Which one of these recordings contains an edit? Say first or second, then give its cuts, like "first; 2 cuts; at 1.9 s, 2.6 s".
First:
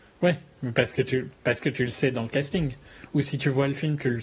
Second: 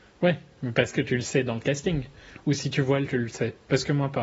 second; 2 cuts; at 0.9 s, 3.1 s